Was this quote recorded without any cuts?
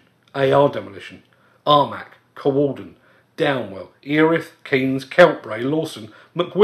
yes; 0 cuts

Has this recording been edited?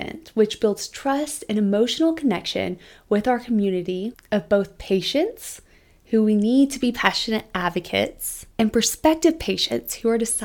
no; 0 cuts

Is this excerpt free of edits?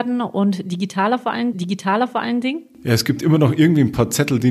no; 1 cut; at 1.5 s

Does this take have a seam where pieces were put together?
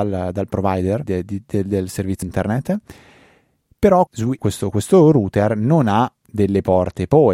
yes; 4 cuts; at 1.0 s, 2.2 s, 4.1 s, 4.4 s

